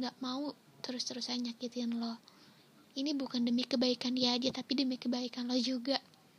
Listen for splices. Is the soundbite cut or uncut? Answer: cut